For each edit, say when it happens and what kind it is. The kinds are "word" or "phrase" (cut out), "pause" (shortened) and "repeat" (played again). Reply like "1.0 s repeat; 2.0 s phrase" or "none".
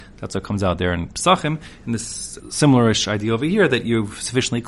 2.4 s word